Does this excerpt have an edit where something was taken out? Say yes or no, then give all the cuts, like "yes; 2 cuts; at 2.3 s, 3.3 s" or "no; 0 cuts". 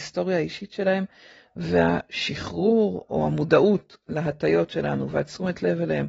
no; 0 cuts